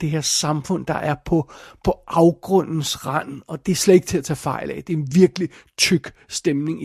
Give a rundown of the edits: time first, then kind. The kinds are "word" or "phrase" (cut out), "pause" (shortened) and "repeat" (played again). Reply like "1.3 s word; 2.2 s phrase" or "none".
3.6 s word